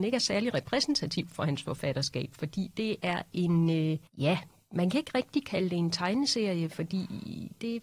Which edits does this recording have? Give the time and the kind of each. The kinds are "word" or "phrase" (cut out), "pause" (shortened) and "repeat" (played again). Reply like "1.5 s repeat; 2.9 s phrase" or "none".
4.1 s pause